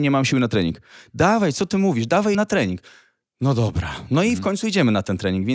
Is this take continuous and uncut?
no; 1 cut; at 2.3 s

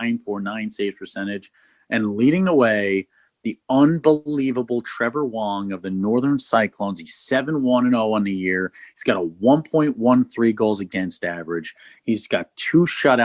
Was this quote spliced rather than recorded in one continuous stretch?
no; 0 cuts

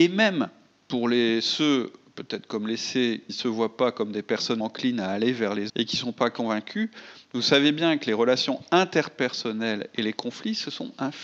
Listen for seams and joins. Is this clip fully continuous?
no; 3 cuts; at 3.3 s, 4.6 s, 5.7 s

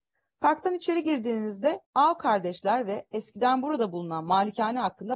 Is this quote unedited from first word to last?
no; 1 cut; at 1.8 s

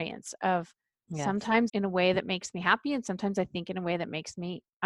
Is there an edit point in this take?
yes; 1 cut; at 1.7 s

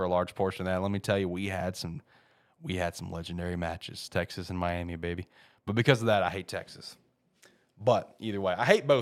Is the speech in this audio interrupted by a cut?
no; 0 cuts

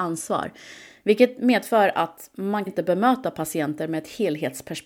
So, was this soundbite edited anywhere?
yes; 1 cut; at 2.7 s

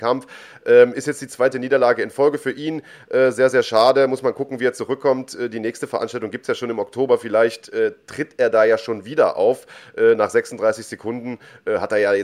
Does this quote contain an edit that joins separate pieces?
no; 0 cuts

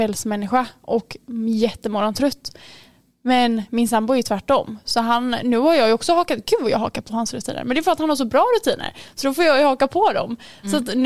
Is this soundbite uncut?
yes; 0 cuts

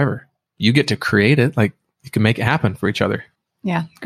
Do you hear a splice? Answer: no; 0 cuts

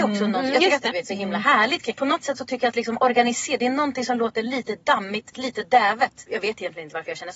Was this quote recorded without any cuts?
no; 2 cuts; at 0.9 s, 5.3 s

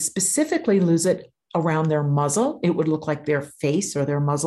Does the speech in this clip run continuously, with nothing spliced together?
yes; 0 cuts

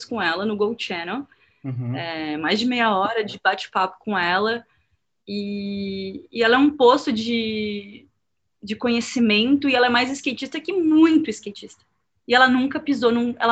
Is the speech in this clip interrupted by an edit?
no; 0 cuts

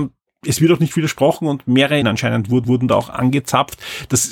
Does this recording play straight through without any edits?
no; 2 cuts; at 2.0 s, 2.6 s

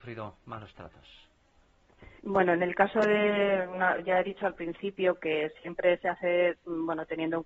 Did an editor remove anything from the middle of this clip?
yes; 1 cut; at 2.2 s

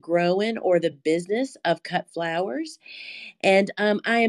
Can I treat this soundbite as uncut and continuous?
yes; 0 cuts

